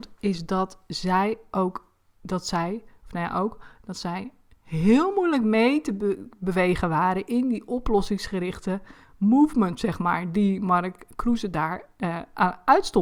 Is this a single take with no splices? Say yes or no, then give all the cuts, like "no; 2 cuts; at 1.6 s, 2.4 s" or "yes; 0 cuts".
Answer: yes; 0 cuts